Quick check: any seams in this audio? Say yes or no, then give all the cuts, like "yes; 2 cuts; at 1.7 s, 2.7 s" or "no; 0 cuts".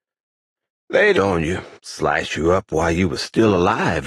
yes; 2 cuts; at 1.1 s, 1.7 s